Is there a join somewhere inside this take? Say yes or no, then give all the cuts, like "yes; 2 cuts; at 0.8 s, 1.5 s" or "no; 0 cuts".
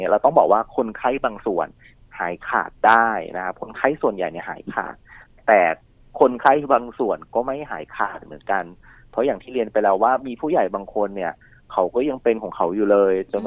no; 0 cuts